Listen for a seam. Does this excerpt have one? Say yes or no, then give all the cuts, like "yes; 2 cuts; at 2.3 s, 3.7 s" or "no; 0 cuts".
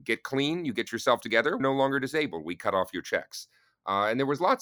yes; 1 cut; at 1.6 s